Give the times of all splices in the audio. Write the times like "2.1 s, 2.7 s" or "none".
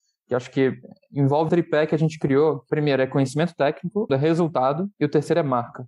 1.5 s, 4.1 s